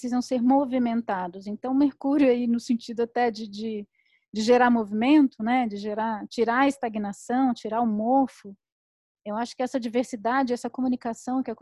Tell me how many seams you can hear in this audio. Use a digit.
0